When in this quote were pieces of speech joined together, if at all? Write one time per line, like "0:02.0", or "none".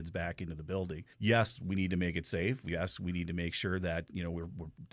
0:01.1